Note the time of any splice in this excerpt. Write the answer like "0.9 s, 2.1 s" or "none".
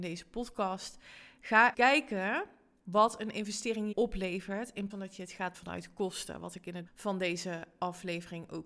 1.7 s, 3.9 s, 4.9 s, 5.5 s, 6.9 s